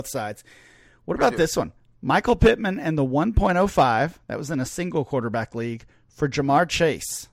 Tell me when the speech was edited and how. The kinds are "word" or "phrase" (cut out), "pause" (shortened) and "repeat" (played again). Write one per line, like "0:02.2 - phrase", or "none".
none